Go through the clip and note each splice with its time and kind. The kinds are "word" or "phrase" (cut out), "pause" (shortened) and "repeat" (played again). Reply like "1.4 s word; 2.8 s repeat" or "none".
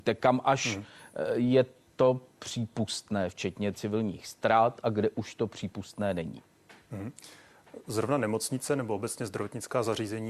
none